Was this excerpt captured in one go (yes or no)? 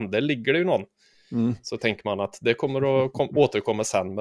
yes